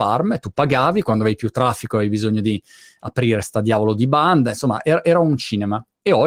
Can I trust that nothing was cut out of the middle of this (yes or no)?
yes